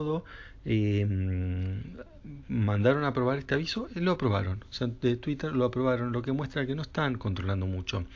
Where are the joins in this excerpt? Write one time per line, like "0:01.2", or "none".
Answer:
0:03.9